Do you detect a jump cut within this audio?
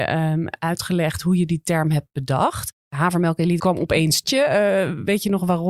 yes; 2 cuts; at 3.6 s, 4.2 s

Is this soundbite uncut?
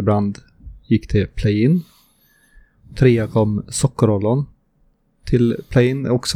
yes; 0 cuts

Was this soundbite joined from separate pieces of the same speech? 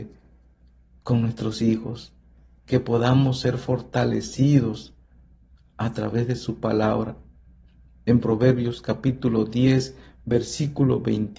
no; 0 cuts

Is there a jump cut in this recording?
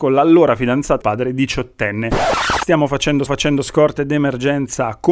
yes; 2 cuts; at 1.0 s, 3.3 s

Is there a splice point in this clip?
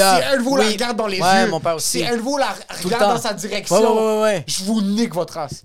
no; 0 cuts

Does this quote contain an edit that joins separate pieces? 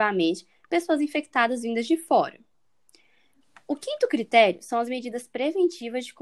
no; 0 cuts

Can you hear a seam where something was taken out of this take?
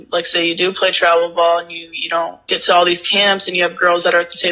no; 0 cuts

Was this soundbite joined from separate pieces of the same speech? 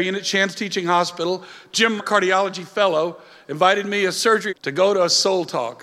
yes; 2 cuts; at 2.0 s, 4.5 s

